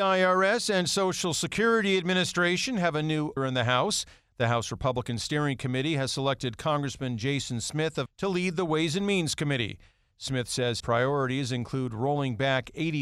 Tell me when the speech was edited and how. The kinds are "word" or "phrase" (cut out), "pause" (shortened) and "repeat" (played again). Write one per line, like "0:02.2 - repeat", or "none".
0:03.4 - word
0:08.1 - word
0:10.8 - word